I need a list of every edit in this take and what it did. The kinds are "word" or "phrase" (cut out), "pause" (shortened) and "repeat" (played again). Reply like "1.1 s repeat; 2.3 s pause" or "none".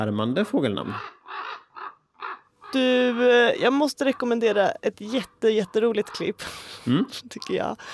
none

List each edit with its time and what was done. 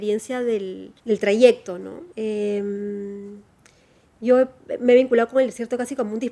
1.0 s pause; 2.1 s pause

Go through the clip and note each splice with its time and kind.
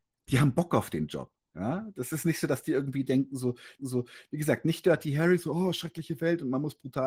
3.8 s repeat

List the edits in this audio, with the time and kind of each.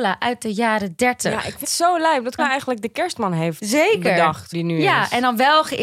1.6 s word; 2.4 s word; 4.5 s word

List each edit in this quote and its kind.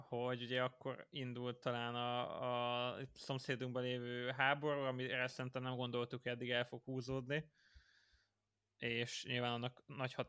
none

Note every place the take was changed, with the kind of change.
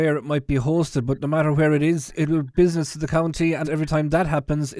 2.1 s word; 2.5 s word; 3.6 s phrase

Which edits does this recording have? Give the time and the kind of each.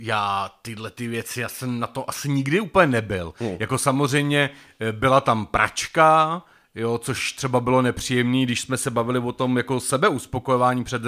none

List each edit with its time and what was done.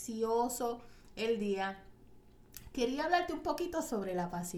none

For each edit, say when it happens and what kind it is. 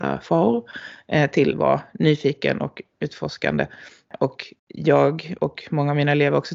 1.5 s word; 4.6 s pause

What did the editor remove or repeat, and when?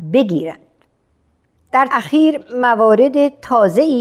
1.9 s phrase

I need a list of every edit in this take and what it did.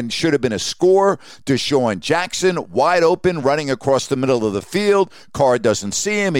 none

